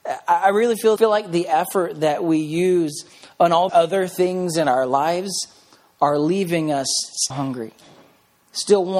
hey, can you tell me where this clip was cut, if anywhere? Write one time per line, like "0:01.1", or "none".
0:01.0
0:03.7
0:07.3